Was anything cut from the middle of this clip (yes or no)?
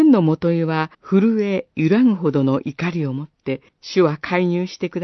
yes